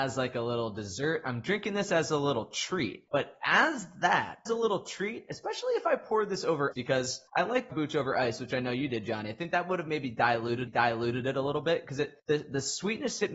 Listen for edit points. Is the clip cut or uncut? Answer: cut